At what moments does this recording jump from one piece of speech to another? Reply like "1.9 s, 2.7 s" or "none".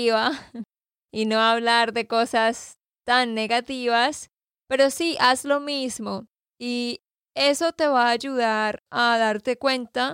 none

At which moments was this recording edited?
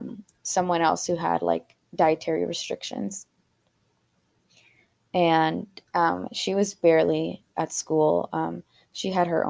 5.9 s

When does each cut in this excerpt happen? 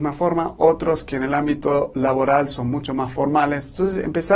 none

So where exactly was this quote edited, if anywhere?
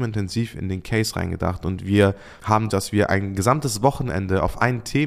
2.7 s

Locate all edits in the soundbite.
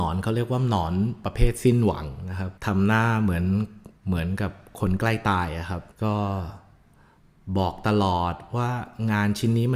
2.6 s, 4.0 s, 5.9 s

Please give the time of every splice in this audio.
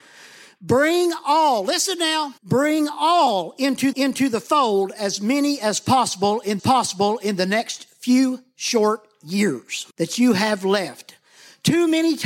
2.4 s, 3.9 s, 6.6 s, 9.9 s

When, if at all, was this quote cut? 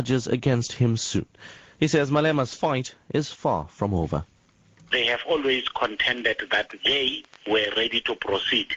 none

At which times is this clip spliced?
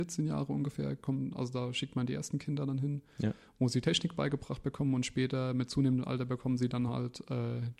none

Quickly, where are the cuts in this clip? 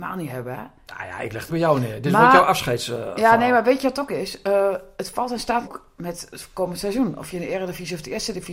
1.5 s, 5.6 s

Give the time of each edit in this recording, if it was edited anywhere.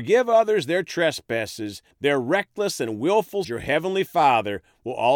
1.9 s, 3.4 s

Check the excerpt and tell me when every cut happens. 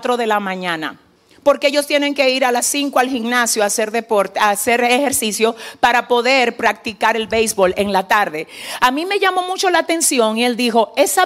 1.2 s

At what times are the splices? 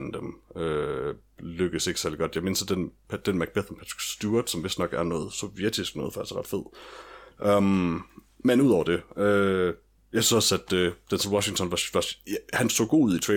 none

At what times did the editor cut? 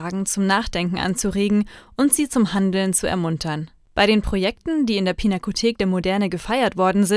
none

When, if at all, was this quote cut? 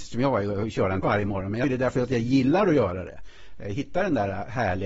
1.0 s, 1.6 s

